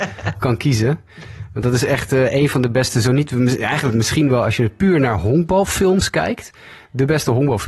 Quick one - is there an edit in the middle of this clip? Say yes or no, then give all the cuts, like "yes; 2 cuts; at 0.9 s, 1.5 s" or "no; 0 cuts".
no; 0 cuts